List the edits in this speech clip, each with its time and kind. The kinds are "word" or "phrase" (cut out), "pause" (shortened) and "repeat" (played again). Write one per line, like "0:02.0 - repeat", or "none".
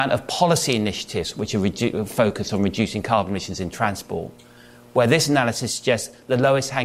none